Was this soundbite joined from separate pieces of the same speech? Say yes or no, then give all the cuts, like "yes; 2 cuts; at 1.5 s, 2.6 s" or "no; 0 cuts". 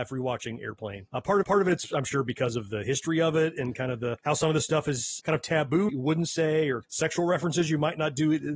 yes; 2 cuts; at 1.4 s, 5.9 s